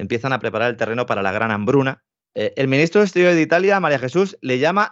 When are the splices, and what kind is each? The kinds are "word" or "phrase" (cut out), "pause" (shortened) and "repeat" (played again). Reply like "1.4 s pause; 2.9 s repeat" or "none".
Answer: 2.2 s pause